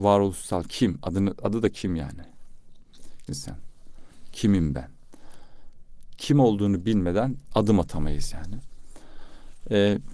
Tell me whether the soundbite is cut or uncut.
cut